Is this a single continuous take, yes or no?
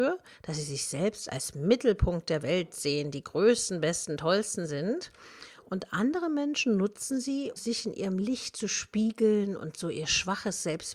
no